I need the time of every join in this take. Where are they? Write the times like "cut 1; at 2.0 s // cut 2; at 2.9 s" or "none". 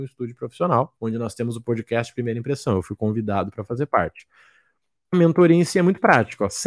cut 1; at 1.0 s